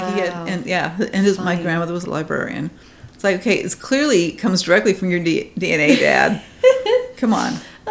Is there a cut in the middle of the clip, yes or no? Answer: no